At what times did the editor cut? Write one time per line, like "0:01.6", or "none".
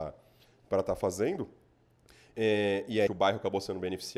0:03.1

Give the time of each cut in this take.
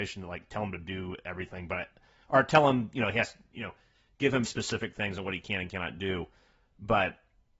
0:04.4

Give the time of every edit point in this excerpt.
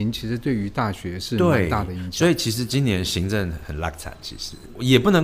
none

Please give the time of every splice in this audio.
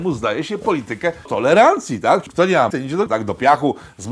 0:01.3
0:02.3
0:02.7
0:03.1

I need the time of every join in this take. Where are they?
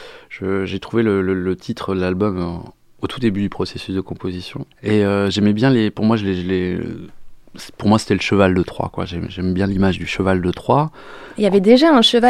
0:04.7

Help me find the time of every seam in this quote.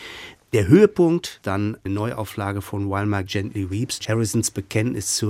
0:01.4
0:01.9
0:03.3
0:04.0

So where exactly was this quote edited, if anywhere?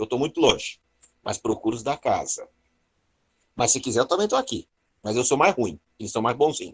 none

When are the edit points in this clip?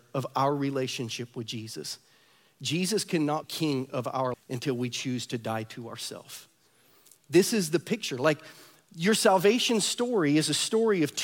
0:03.4
0:04.3

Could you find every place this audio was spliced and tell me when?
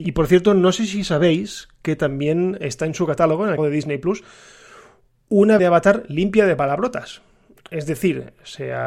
0:03.6
0:05.6

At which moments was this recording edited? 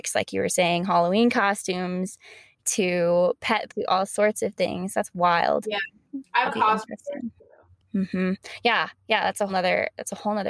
0:03.7
0:06.4
0:09.5

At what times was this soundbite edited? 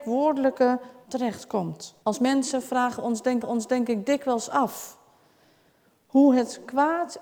0:01.0
0:02.0
0:03.4

